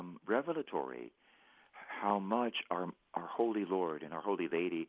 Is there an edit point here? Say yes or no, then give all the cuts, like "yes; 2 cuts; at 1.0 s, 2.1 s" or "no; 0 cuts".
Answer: no; 0 cuts